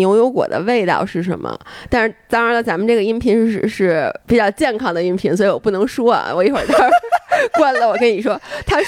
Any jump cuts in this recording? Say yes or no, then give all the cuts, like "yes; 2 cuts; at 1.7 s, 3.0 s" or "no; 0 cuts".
yes; 1 cut; at 4.2 s